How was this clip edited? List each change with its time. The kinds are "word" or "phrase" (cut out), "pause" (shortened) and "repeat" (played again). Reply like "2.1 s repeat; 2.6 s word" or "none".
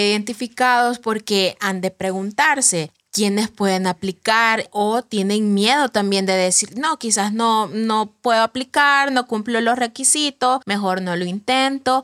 10.6 s pause